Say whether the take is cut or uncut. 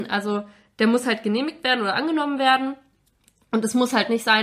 uncut